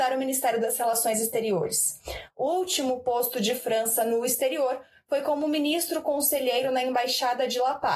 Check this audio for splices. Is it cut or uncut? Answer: uncut